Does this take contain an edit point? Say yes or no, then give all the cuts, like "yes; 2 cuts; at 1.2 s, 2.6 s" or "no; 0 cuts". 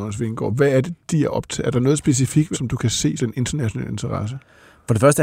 yes; 2 cuts; at 2.5 s, 3.2 s